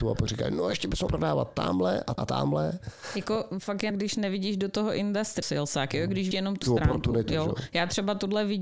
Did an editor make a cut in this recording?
yes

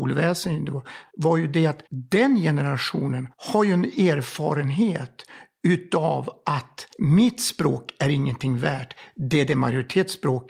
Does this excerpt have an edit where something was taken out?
yes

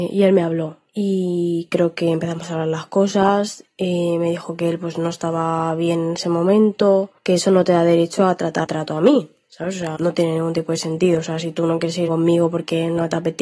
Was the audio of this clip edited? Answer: yes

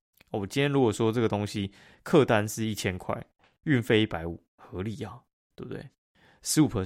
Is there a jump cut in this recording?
no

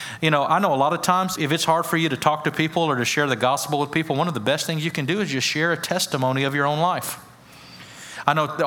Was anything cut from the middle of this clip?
yes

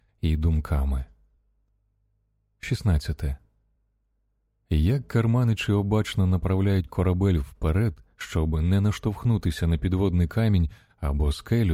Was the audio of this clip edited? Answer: no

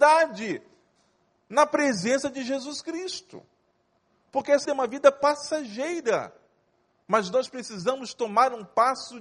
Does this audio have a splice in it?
yes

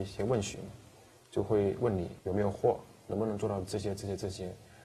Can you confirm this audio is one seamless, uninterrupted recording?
no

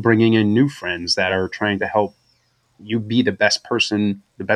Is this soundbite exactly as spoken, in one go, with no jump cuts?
yes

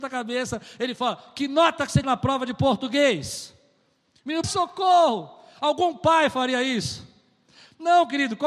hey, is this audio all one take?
no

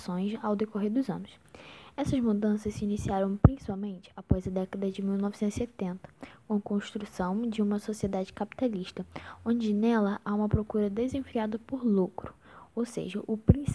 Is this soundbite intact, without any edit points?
yes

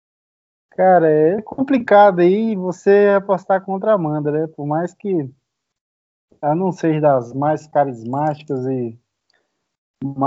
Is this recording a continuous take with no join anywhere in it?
no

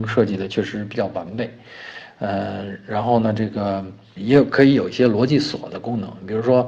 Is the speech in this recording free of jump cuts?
no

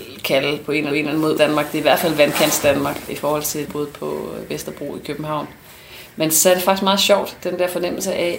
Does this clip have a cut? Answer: yes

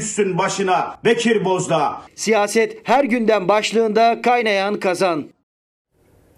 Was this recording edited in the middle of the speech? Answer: no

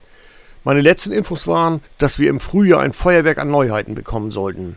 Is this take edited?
yes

